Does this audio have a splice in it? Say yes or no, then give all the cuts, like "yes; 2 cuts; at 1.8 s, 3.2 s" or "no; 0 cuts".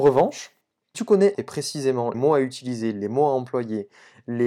yes; 3 cuts; at 0.9 s, 1.3 s, 2.1 s